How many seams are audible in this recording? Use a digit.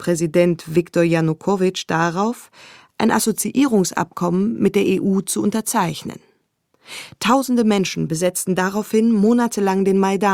0